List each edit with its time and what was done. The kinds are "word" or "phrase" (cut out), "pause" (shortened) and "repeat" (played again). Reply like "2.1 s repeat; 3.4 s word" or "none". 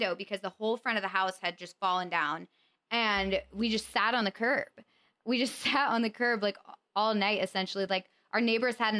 none